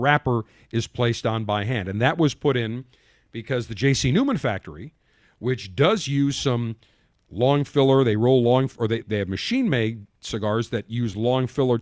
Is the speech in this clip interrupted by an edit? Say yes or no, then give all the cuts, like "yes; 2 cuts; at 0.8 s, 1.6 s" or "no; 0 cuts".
yes; 1 cut; at 9.0 s